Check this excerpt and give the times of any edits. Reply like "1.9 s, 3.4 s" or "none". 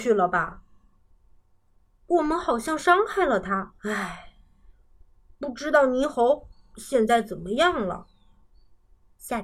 3.8 s